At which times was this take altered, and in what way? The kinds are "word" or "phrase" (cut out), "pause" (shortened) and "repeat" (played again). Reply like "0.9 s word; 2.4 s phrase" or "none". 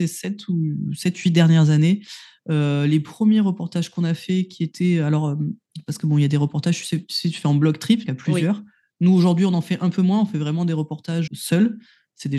8.1 s word; 11.3 s word